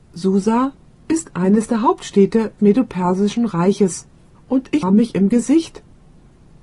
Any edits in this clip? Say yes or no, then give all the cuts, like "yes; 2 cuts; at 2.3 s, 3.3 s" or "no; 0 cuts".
yes; 3 cuts; at 2.6 s, 4.3 s, 4.8 s